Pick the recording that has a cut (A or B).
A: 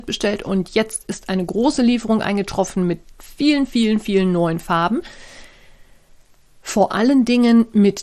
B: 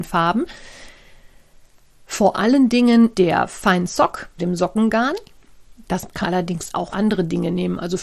B